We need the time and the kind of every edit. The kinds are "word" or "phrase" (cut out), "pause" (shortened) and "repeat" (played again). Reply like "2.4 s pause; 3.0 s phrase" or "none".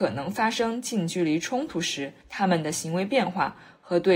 2.2 s pause

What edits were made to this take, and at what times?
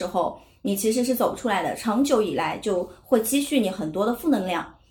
none

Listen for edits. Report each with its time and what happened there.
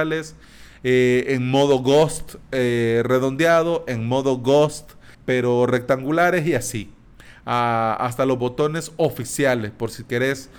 5.1 s pause

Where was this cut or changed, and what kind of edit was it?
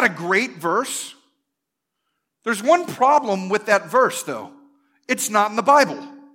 none

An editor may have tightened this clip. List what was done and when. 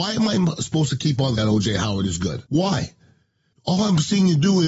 1.4 s word; 2.5 s pause

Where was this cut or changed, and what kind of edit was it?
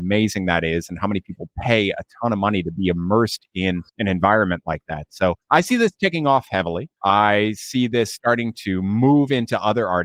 3.9 s pause; 5.4 s pause; 7.0 s pause

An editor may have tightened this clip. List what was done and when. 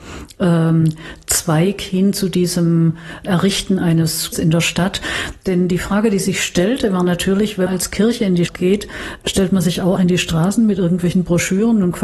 3.2 s word; 4.3 s word; 7.7 s word; 8.5 s word; 10.0 s word

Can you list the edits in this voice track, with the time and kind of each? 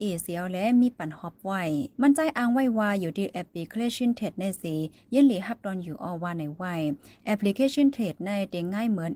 none

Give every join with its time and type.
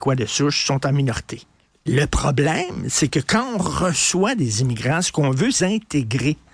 1.6 s pause; 5.6 s word

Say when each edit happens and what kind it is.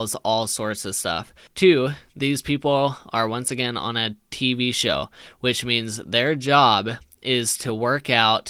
1.5 s pause

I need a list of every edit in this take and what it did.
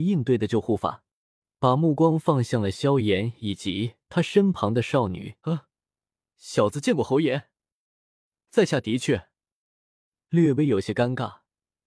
5.4 s pause

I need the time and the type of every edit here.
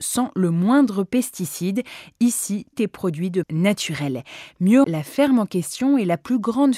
2.7 s word; 3.4 s word; 4.8 s word

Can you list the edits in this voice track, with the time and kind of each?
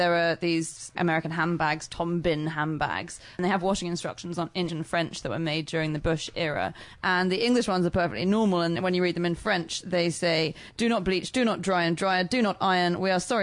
4.7 s word; 8.7 s word

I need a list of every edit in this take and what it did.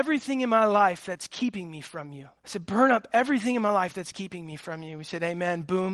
2.4 s pause

